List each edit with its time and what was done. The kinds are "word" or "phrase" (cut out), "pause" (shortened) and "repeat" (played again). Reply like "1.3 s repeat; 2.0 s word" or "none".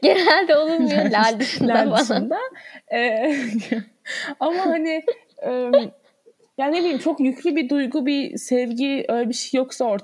none